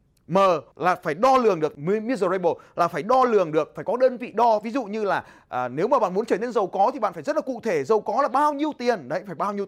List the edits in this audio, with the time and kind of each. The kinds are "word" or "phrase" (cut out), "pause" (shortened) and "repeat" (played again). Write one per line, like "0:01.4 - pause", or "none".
none